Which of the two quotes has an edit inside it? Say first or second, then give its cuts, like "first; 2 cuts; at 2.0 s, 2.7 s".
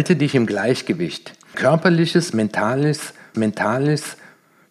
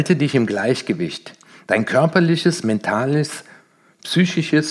first; 2 cuts; at 1.5 s, 3.3 s